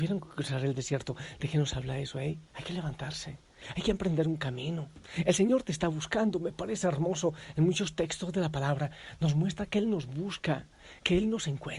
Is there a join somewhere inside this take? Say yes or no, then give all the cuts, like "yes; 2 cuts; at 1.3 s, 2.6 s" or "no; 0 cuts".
yes; 1 cut; at 2.5 s